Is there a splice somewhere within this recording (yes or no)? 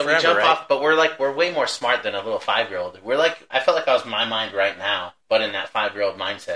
yes